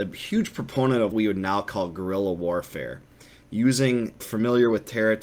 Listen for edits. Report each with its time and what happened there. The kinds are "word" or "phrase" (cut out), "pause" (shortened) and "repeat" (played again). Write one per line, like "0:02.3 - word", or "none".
0:01.1 - word
0:04.2 - phrase